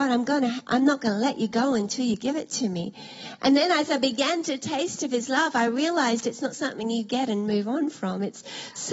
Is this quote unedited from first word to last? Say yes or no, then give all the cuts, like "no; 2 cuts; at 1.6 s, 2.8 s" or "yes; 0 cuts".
yes; 0 cuts